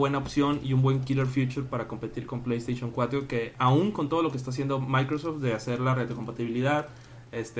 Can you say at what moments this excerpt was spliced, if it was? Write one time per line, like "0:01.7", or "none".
none